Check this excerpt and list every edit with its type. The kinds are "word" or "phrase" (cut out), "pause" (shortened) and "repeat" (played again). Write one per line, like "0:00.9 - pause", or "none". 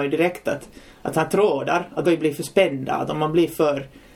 0:02.0 - word